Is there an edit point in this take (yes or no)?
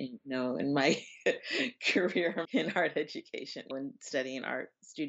yes